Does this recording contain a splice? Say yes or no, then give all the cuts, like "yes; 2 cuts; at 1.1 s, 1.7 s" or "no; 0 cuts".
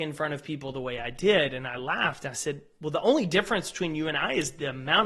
no; 0 cuts